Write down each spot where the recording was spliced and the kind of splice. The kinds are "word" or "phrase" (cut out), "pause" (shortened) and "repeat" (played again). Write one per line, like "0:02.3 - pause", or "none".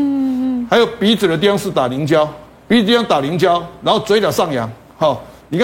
0:02.6 - word